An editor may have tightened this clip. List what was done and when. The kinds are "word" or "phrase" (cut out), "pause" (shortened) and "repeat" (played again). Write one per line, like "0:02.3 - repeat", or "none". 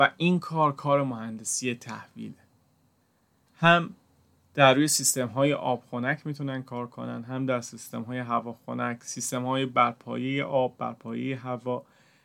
none